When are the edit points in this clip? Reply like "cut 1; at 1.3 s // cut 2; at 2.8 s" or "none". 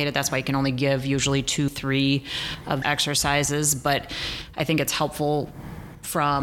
cut 1; at 1.7 s // cut 2; at 2.8 s